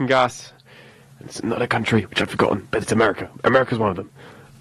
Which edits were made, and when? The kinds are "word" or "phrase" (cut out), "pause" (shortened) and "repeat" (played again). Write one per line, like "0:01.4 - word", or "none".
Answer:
0:02.3 - word
0:02.8 - word

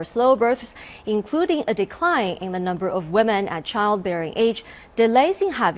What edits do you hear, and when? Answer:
none

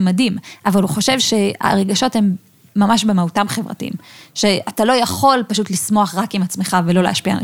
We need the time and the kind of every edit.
none

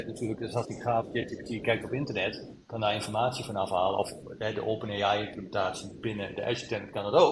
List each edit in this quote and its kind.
none

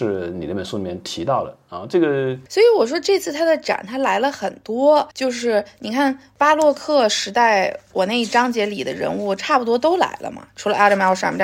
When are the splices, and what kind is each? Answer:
0:05.1 - pause

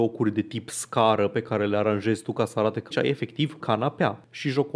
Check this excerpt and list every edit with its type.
0:02.9 - phrase
0:03.6 - word

